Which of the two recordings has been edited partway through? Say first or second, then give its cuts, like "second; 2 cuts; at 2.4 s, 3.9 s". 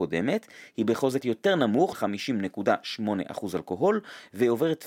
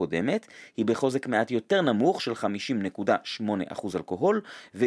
first; 2 cuts; at 1.2 s, 1.9 s